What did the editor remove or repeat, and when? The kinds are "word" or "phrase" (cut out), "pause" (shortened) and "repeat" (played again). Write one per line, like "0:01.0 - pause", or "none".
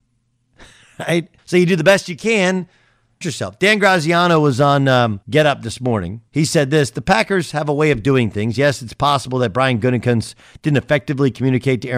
0:01.4 - pause
0:03.2 - phrase
0:05.2 - pause
0:06.3 - pause